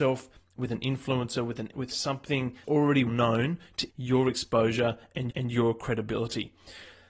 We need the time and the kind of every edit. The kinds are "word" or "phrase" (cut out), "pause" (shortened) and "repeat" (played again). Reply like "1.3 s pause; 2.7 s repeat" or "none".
1.7 s word; 2.6 s word; 3.1 s word; 3.9 s word; 5.3 s repeat